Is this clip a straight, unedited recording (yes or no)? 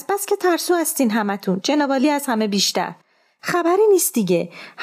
yes